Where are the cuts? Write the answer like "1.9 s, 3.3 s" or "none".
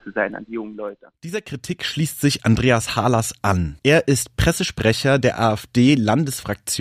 3.8 s